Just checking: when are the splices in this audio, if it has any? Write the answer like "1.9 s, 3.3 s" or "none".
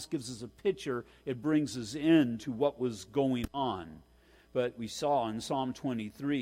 none

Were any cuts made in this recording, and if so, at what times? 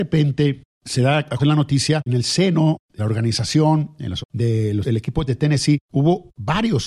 1.4 s, 2.1 s, 3.0 s, 4.2 s, 4.8 s, 5.3 s

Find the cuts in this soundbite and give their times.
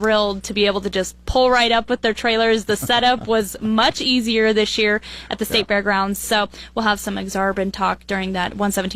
none

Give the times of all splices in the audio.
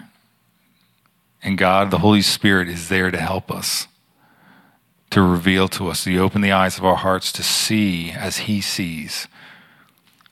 none

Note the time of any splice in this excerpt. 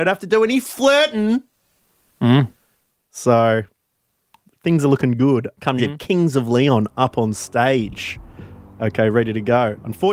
5.8 s

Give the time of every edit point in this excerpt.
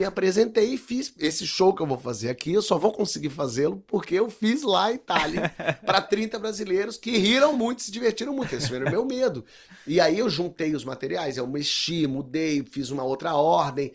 none

